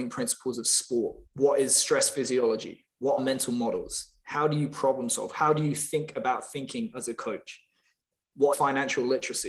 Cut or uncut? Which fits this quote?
cut